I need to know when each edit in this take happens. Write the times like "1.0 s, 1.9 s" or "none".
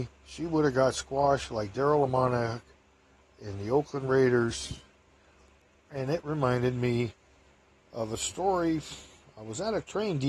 none

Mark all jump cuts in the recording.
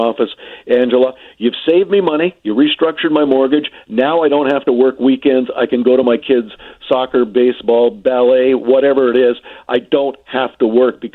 none

